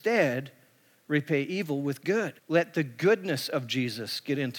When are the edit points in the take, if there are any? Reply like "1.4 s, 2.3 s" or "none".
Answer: 2.4 s